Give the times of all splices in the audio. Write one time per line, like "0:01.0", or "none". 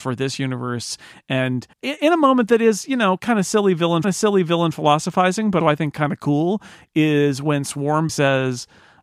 0:01.7
0:04.0
0:05.6
0:08.1